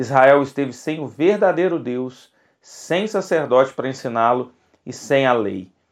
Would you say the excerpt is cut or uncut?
uncut